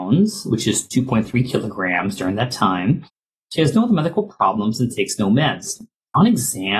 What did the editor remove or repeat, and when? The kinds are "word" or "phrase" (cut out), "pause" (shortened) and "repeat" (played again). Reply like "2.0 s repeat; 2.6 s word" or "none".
none